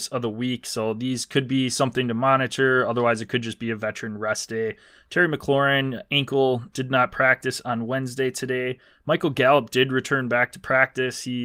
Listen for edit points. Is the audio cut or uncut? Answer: uncut